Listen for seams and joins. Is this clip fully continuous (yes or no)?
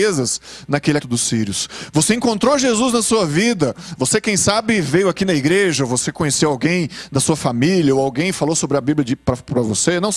no